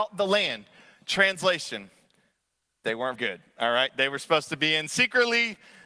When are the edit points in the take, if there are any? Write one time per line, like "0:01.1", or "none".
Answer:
0:03.1